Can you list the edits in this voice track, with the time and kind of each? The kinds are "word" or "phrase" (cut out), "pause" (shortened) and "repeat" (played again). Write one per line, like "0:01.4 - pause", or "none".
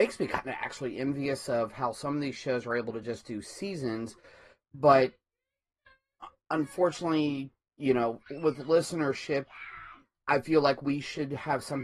none